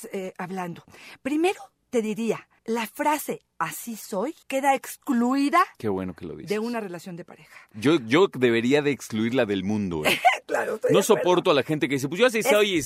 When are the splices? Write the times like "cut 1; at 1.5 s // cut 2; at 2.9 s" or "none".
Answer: cut 1; at 2.6 s // cut 2; at 4.4 s // cut 3; at 5.7 s